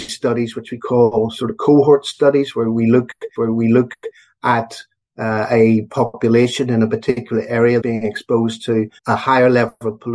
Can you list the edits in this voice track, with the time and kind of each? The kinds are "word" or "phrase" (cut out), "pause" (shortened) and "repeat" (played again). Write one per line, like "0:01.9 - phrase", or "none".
0:03.4 - repeat
0:07.8 - word
0:09.0 - pause

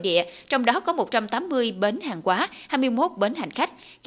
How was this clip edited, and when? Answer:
none

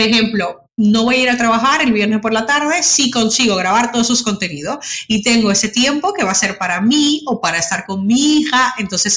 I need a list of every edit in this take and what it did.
none

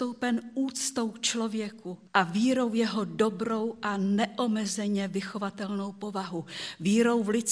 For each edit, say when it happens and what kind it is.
0:02.0 - pause

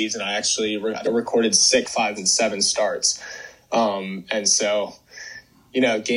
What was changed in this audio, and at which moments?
0:01.0 - word
0:01.8 - word
0:02.2 - word

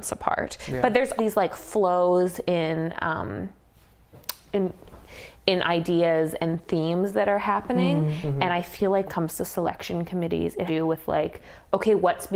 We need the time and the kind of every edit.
0:01.2 - word
0:09.1 - phrase
0:10.7 - phrase

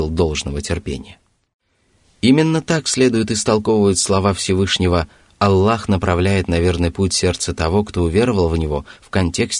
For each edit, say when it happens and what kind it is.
none

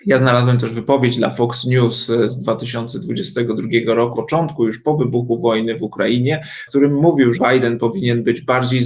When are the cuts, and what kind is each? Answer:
0:02.3 - word
0:04.1 - word
0:06.7 - word
0:07.3 - word

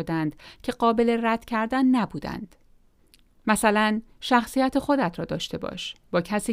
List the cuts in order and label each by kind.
0:03.0 - pause

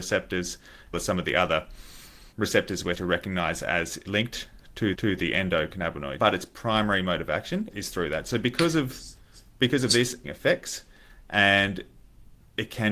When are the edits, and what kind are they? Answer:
0:00.9 - phrase
0:02.3 - pause
0:02.9 - word
0:04.1 - word
0:04.9 - repeat
0:06.2 - word
0:07.7 - word
0:10.2 - word

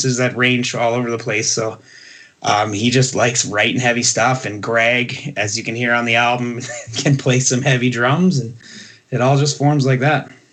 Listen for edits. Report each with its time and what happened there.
none

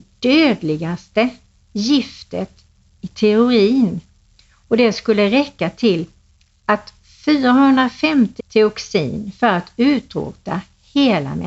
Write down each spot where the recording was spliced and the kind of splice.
0:08.4 - word

